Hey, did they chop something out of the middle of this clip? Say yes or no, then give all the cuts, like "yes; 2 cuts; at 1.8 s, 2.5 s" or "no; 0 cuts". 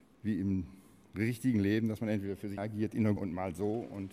yes; 2 cuts; at 2.6 s, 3.2 s